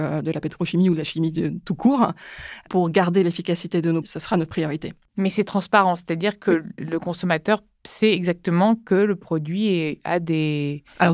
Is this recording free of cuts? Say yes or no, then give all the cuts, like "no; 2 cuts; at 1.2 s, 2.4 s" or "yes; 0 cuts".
no; 1 cut; at 4.0 s